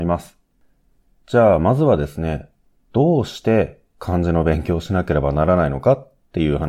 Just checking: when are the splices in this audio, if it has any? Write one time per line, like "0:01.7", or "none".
none